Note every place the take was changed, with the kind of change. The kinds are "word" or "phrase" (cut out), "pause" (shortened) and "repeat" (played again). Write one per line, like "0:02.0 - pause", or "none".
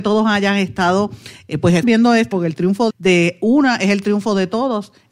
0:01.8 - word
0:02.3 - phrase
0:02.9 - word